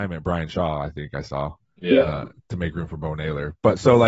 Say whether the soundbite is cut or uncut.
cut